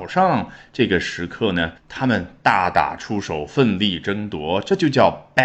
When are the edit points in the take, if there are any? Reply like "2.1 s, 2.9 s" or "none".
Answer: 1.8 s